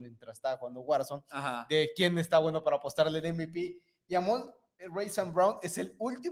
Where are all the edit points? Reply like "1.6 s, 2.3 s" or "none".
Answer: none